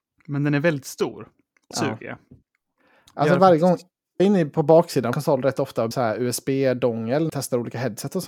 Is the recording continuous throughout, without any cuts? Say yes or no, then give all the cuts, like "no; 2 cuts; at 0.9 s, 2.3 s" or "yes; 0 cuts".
no; 5 cuts; at 1.7 s, 4.2 s, 5.1 s, 5.9 s, 7.3 s